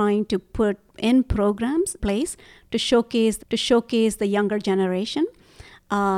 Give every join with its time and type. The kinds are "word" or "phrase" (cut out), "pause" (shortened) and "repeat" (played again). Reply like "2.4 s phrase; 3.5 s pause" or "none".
2.0 s word; 3.4 s repeat